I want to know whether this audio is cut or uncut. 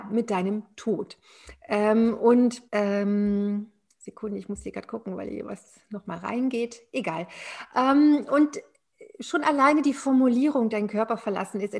cut